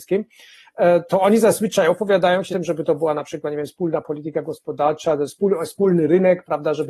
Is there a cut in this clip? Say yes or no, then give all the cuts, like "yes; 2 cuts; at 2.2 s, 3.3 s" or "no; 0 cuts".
yes; 1 cut; at 2.5 s